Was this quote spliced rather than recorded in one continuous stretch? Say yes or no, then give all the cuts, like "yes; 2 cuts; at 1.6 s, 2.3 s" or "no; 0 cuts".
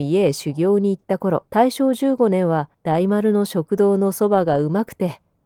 yes; 2 cuts; at 1.5 s, 2.7 s